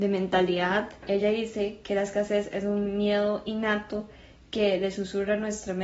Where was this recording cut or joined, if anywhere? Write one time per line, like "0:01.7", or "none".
none